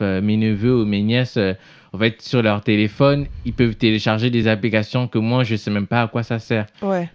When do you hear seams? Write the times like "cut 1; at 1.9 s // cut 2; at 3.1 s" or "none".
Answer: none